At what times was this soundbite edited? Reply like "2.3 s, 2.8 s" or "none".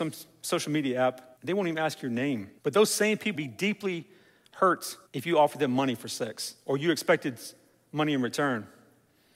1.4 s, 2.6 s, 3.3 s, 5.1 s